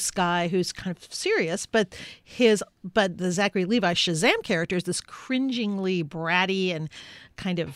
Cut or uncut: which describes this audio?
uncut